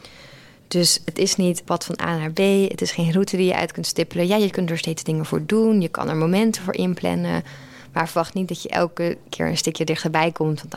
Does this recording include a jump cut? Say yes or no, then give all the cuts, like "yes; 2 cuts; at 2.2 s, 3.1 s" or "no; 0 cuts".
yes; 1 cut; at 1.6 s